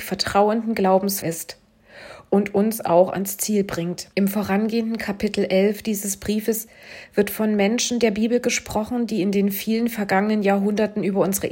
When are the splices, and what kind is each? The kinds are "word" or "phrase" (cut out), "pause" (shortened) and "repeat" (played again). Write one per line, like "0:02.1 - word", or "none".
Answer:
0:01.2 - word
0:04.1 - pause